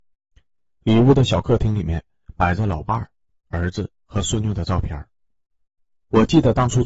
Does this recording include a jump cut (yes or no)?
no